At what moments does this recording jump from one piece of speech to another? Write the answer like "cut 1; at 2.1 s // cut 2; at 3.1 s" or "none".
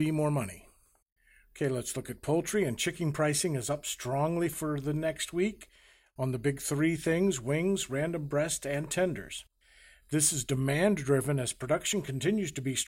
none